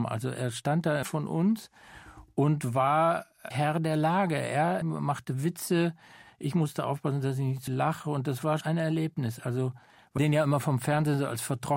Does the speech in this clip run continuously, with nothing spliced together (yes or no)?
no